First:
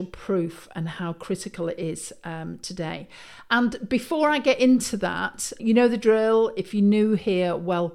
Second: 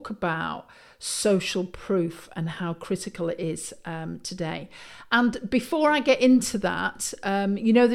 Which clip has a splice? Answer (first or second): first